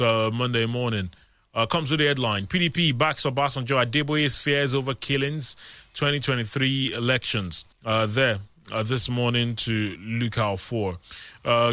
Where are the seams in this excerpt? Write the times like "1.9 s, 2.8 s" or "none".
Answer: 7.7 s